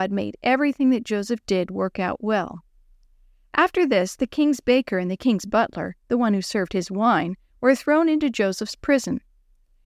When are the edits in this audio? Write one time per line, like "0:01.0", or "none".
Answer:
none

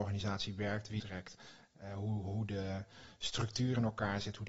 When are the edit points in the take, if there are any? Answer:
0:01.0

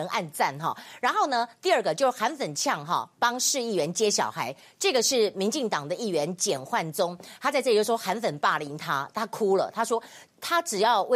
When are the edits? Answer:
none

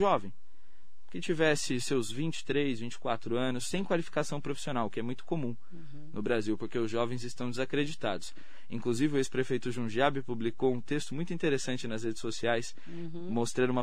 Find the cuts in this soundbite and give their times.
none

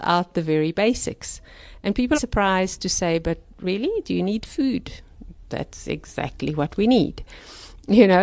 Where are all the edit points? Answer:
0:02.1

